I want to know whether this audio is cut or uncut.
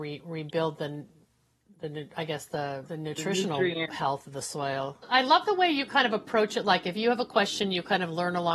uncut